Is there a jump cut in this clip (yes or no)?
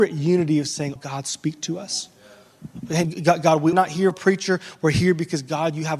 yes